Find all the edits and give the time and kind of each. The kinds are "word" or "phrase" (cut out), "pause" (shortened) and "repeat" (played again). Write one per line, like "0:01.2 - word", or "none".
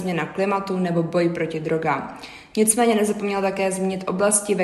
none